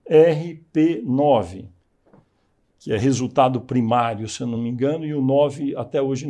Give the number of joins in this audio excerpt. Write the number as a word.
zero